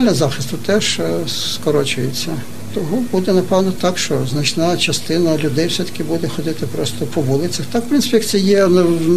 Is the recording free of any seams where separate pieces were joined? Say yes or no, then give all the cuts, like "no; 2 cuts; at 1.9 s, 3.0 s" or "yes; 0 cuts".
yes; 0 cuts